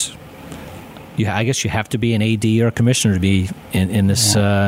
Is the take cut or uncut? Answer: uncut